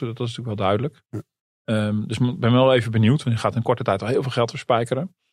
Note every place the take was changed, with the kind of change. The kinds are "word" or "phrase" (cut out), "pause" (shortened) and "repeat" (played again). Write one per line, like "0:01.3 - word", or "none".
0:01.1 - pause